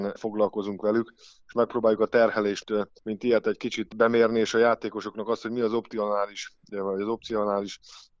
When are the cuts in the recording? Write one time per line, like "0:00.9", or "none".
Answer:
0:02.6
0:03.0